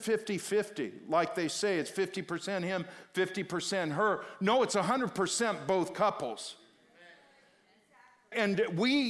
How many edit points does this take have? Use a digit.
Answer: 0